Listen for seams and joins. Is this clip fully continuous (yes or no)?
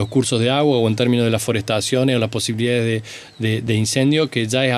yes